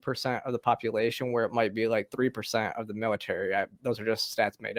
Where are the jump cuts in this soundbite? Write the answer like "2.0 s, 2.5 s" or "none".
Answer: none